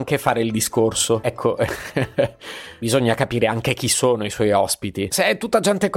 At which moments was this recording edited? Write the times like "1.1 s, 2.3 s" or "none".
none